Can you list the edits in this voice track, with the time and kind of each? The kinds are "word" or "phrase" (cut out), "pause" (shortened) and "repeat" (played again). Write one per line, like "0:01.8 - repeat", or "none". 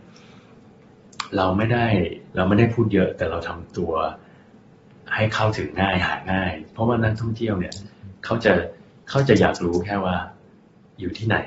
0:02.3 - pause